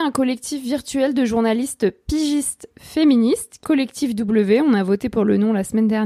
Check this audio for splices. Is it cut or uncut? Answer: cut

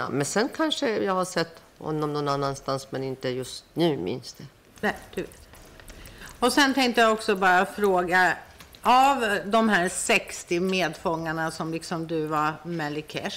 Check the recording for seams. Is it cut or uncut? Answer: uncut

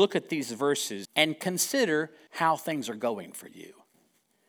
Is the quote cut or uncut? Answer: cut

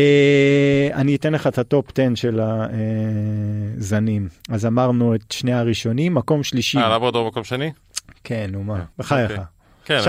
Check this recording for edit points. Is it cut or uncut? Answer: cut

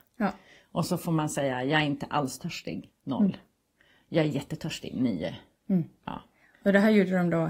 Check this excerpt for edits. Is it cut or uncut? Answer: uncut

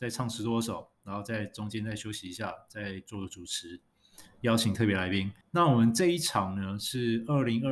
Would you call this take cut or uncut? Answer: cut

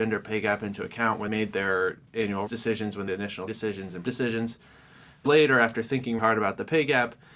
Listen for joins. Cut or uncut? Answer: cut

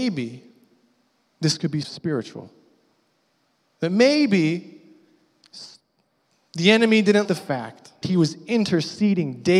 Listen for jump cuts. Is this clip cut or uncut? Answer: cut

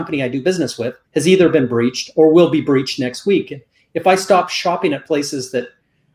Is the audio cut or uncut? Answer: cut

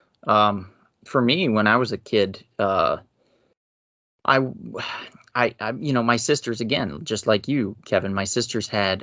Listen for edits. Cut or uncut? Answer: uncut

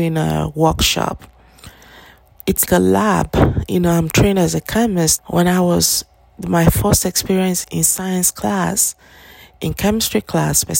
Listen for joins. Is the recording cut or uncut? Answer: cut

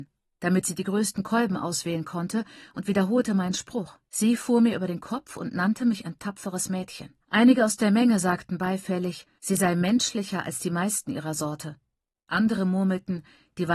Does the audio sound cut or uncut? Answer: cut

